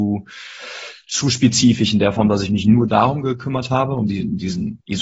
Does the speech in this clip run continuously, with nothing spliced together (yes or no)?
yes